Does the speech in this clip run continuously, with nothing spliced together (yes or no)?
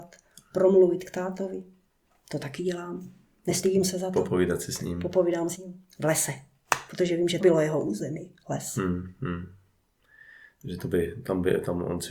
no